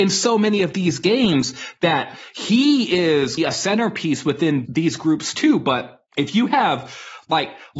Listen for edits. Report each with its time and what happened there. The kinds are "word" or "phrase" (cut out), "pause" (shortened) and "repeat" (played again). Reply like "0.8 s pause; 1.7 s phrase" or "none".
3.4 s phrase; 4.7 s word; 6.1 s pause